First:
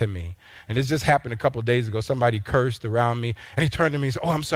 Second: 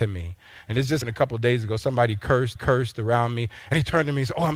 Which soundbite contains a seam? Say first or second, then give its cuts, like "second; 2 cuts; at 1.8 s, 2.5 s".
second; 2 cuts; at 1.0 s, 2.6 s